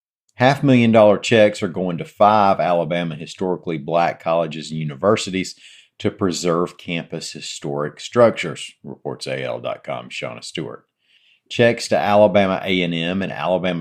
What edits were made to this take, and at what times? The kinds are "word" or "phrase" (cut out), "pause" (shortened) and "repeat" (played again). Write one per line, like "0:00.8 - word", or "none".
none